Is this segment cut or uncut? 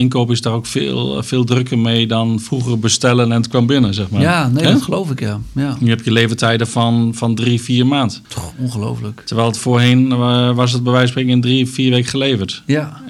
cut